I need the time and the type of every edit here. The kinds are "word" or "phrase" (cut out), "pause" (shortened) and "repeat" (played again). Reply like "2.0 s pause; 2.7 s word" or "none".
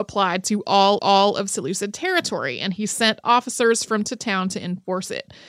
1.0 s repeat; 3.2 s word; 4.0 s word